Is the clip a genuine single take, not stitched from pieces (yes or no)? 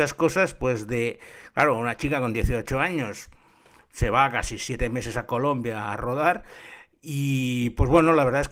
yes